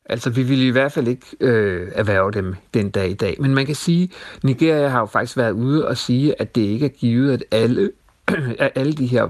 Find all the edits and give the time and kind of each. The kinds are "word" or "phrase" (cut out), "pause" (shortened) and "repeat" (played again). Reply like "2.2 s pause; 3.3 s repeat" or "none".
none